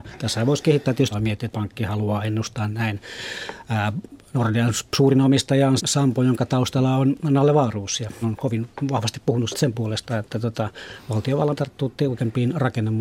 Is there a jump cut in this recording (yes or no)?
yes